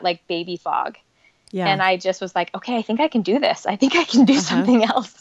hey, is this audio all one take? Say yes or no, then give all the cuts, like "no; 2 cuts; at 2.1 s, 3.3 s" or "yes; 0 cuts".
yes; 0 cuts